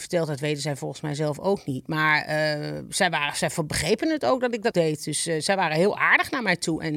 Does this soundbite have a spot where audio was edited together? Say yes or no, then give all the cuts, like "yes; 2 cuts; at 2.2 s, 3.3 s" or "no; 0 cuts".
yes; 1 cut; at 4.7 s